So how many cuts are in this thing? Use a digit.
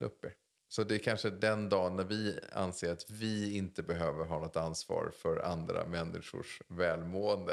0